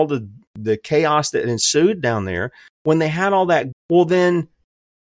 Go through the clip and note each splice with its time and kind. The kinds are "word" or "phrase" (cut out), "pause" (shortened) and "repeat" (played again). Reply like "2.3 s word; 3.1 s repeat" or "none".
3.7 s word